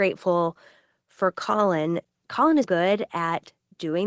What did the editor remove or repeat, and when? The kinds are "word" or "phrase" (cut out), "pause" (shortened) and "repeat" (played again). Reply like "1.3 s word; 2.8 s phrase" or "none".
2.6 s word